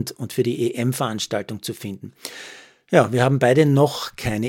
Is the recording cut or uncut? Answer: uncut